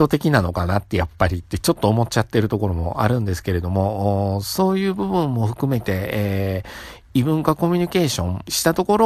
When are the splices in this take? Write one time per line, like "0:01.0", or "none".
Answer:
none